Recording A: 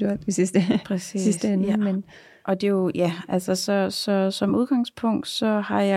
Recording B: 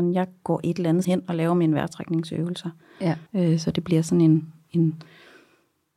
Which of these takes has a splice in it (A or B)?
B